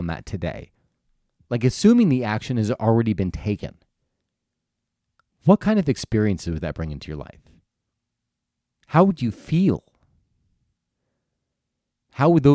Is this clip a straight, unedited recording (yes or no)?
yes